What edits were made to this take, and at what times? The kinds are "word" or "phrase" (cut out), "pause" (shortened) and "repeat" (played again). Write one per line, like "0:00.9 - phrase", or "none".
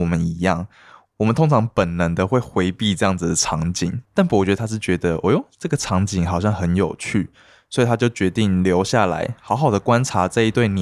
0:04.1 - pause